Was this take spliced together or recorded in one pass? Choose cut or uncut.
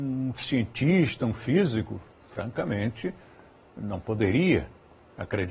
uncut